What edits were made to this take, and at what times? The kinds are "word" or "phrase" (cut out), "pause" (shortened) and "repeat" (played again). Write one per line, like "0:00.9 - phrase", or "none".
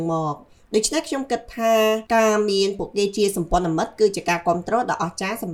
0:02.1 - pause